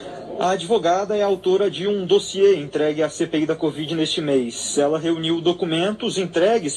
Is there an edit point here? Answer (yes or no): no